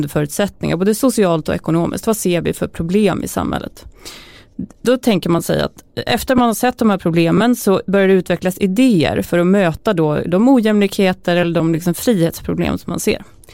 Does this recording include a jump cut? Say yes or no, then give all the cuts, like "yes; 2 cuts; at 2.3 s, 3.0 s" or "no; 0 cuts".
no; 0 cuts